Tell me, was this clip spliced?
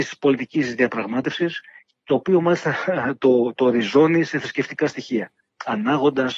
no; 0 cuts

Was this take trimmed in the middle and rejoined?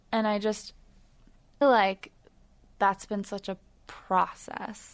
yes; 1 cut; at 1.6 s

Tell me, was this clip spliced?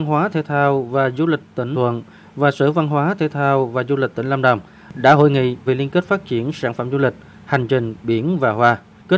yes; 2 cuts; at 1.7 s, 5.7 s

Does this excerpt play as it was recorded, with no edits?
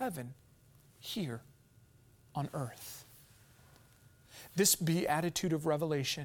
yes; 0 cuts

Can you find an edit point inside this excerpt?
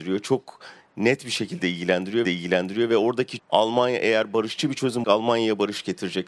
yes; 3 cuts; at 2.2 s, 3.4 s, 5.0 s

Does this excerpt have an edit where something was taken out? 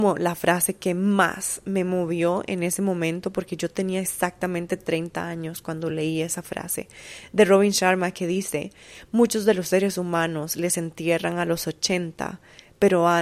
no; 0 cuts

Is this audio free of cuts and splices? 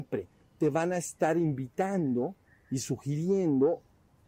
yes; 0 cuts

